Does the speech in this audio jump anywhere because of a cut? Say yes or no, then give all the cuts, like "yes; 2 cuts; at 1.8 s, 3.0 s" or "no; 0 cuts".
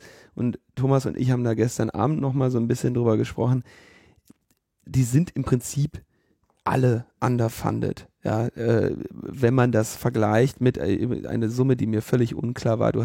no; 0 cuts